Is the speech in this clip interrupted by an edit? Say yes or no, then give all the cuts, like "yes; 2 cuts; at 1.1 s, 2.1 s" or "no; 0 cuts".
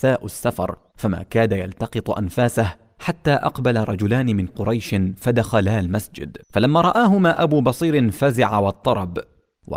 yes; 3 cuts; at 0.9 s, 4.5 s, 6.4 s